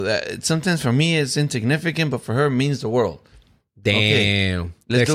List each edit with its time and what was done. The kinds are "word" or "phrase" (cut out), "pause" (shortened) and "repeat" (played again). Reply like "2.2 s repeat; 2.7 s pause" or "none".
none